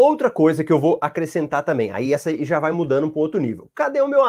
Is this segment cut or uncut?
uncut